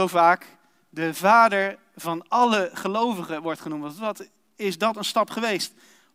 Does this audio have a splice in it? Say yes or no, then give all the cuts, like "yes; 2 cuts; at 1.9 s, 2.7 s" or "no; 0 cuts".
no; 0 cuts